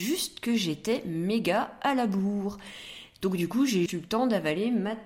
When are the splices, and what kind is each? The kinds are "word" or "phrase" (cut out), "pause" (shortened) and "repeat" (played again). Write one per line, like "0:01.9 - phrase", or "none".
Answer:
0:03.9 - word